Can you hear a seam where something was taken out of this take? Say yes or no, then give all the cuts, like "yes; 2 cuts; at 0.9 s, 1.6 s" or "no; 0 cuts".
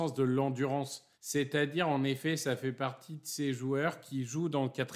yes; 1 cut; at 1.1 s